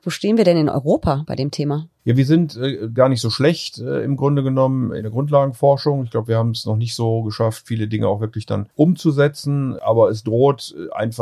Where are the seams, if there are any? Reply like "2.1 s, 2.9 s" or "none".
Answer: 1.9 s